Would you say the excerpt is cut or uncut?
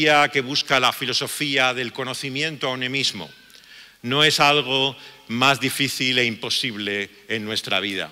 uncut